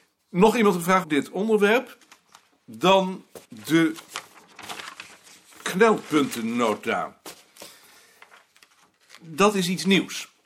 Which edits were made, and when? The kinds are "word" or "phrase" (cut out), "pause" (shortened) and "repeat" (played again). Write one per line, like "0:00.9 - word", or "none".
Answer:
0:01.0 - word
0:03.4 - pause